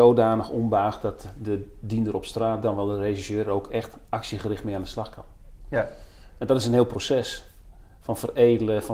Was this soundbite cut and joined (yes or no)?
no